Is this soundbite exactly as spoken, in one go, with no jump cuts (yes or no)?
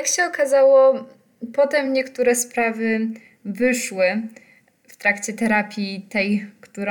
yes